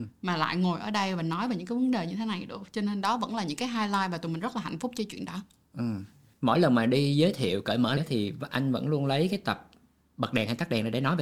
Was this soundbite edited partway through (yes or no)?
yes